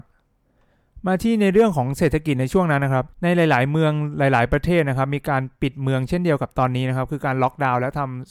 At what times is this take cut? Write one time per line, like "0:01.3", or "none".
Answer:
0:03.1